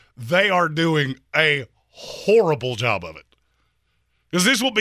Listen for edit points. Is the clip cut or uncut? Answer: uncut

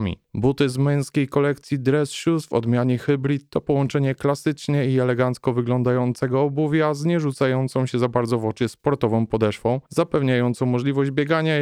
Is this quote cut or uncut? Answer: uncut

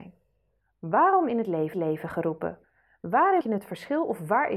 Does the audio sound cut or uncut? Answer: cut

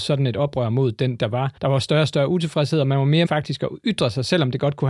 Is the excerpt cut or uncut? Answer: cut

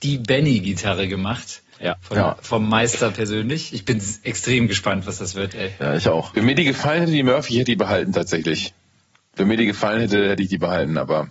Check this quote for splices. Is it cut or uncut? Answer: cut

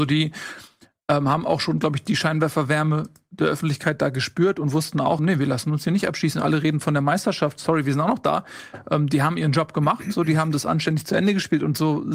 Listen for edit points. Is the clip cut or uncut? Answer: cut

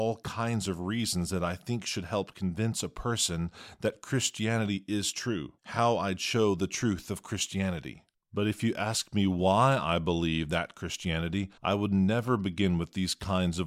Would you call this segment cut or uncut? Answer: cut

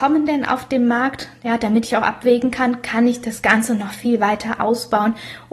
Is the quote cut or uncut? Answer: uncut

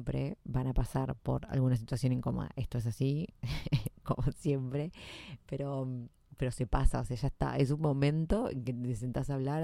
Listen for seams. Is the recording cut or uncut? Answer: uncut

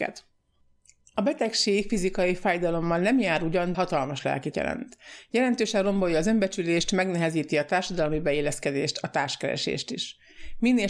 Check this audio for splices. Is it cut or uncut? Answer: cut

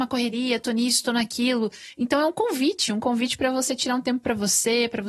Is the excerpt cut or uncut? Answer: uncut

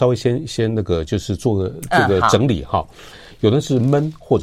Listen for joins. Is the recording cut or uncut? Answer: uncut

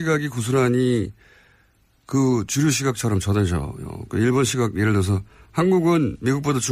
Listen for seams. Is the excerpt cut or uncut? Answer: uncut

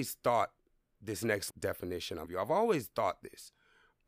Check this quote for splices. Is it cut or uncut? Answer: cut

